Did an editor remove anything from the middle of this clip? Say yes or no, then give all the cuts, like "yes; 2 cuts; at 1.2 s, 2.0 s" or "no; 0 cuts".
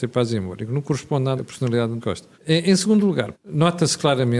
yes; 4 cuts; at 1.4 s, 2.0 s, 2.3 s, 3.3 s